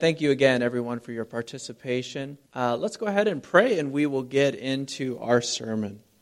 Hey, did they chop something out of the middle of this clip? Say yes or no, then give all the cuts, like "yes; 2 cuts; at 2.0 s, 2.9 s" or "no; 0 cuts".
yes; 1 cut; at 2.5 s